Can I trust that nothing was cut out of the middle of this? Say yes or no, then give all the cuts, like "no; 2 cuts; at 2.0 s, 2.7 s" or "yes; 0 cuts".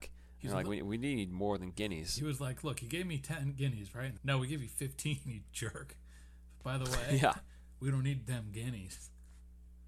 no; 1 cut; at 4.2 s